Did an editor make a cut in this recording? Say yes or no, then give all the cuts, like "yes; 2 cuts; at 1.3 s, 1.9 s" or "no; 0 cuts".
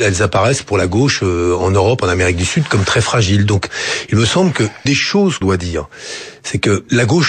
yes; 2 cuts; at 4.9 s, 5.4 s